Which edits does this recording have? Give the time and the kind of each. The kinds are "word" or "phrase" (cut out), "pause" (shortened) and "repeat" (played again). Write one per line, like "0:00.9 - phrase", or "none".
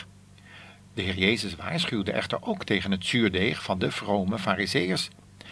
none